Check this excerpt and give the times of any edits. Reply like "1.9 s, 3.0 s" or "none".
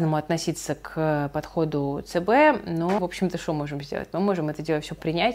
3.0 s